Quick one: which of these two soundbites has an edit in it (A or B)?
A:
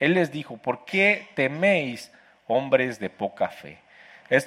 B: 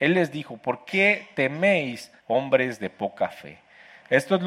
B